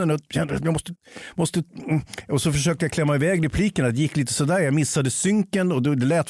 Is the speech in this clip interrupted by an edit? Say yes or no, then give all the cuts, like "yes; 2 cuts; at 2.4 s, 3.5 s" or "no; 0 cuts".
no; 0 cuts